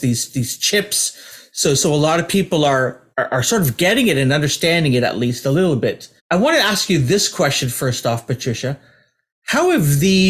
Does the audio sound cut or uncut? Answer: cut